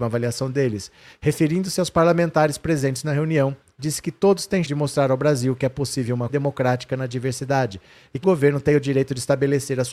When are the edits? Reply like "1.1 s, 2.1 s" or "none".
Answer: 4.6 s, 6.3 s, 8.2 s